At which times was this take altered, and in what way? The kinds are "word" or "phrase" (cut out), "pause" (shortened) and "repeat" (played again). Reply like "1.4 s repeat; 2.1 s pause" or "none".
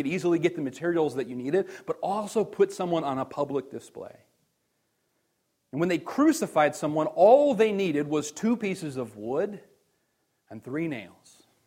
none